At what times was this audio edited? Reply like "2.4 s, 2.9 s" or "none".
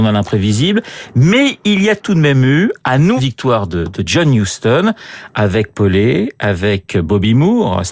3.2 s